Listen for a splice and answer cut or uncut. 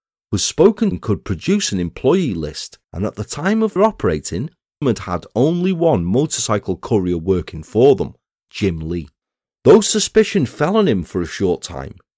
cut